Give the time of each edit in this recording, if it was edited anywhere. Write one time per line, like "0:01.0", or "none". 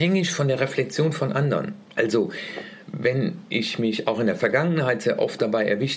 0:01.9